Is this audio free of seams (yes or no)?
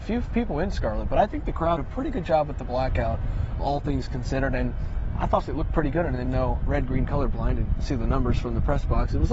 no